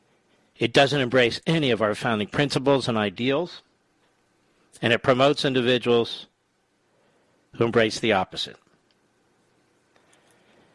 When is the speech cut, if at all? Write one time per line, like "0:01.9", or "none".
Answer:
none